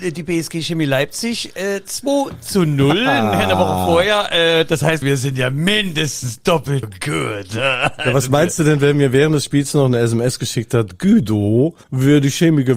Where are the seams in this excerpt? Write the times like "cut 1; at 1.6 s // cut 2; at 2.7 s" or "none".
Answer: cut 1; at 5.0 s // cut 2; at 6.8 s // cut 3; at 11.8 s